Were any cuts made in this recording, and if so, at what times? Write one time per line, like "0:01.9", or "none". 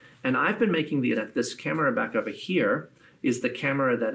0:01.1